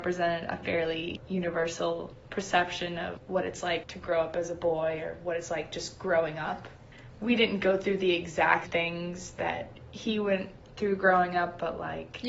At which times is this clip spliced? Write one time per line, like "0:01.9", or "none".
0:08.6